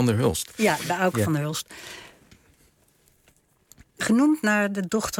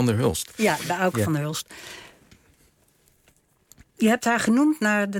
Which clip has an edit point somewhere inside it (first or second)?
first